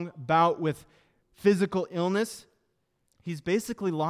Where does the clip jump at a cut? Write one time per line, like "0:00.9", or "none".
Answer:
none